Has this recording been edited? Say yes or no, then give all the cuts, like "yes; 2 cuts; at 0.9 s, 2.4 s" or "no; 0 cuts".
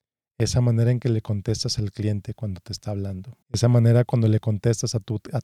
yes; 1 cut; at 3.4 s